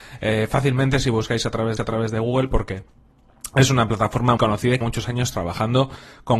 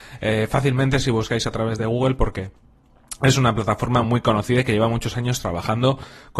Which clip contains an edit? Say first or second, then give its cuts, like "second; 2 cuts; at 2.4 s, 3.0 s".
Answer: first; 3 cuts; at 1.8 s, 4.4 s, 4.8 s